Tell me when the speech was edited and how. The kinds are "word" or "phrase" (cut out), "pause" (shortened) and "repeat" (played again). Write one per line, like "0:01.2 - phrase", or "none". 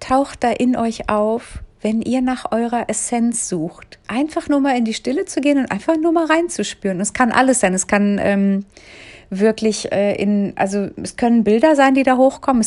0:04.0 - pause